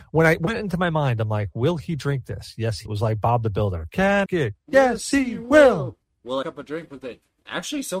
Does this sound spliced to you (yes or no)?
yes